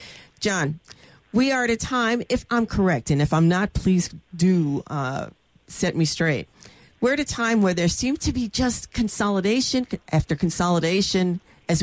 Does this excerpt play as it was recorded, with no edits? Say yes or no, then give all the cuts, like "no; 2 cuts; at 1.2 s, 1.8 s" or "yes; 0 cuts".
yes; 0 cuts